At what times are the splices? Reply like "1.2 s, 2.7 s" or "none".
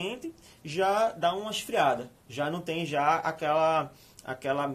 2.2 s